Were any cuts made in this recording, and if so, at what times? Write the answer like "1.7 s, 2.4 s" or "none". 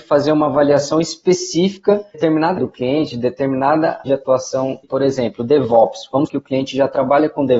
2.1 s, 2.6 s, 4.1 s, 4.8 s, 6.3 s